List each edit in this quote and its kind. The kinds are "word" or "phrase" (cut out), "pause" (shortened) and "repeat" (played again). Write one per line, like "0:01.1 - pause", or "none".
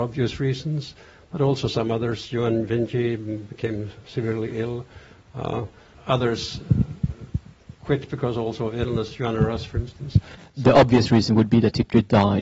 none